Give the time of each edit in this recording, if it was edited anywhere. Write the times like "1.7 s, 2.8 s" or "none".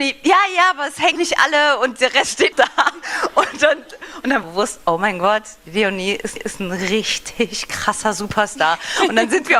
1.1 s, 2.5 s, 4.4 s, 6.4 s